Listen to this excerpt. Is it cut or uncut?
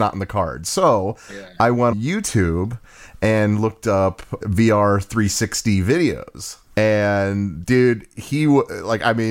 cut